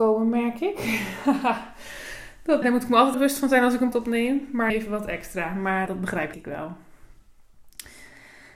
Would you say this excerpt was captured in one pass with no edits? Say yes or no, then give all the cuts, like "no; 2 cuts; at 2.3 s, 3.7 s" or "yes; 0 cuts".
no; 6 cuts; at 2.6 s, 3.1 s, 3.9 s, 4.7 s, 5.9 s, 6.3 s